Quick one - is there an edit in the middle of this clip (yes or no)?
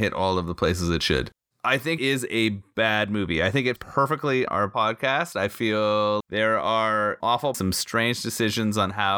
yes